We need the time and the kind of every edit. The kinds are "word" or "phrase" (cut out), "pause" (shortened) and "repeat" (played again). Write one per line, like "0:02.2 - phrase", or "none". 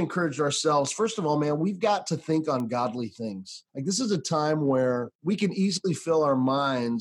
0:03.7 - pause
0:05.2 - pause

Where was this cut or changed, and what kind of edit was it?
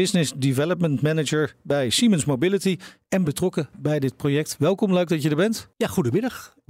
0:05.7 - pause

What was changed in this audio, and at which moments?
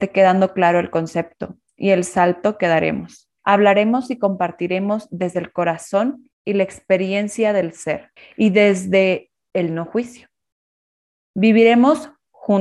0:03.4 - pause
0:06.3 - pause
0:08.2 - pause

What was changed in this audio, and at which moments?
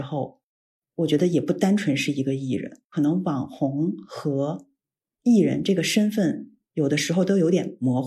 0:02.8 - pause

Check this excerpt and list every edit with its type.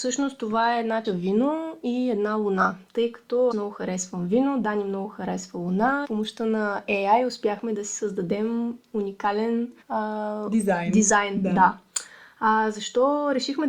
0:01.0 - word
0:03.5 - word
0:06.0 - phrase
0:09.8 - pause

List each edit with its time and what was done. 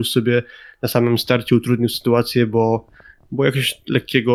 none

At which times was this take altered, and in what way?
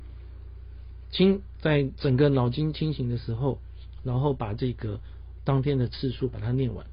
0:04.0 - word

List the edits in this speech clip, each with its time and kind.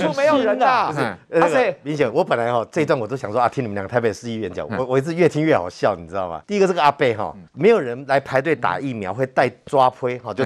0:06.4 - pause
0:07.5 - pause

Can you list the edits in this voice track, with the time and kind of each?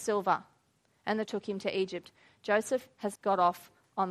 0:01.3 - word
0:03.2 - word

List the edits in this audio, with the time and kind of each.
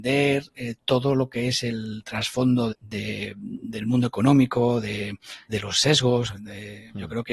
0:02.7 - word
0:05.5 - word

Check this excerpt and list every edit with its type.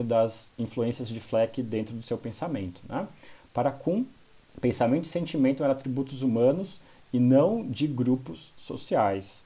none

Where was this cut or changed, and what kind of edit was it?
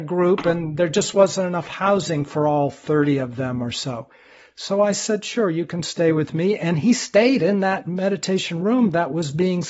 none

